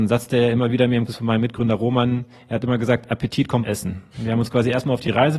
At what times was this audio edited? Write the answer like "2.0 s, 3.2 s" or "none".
1.1 s, 3.6 s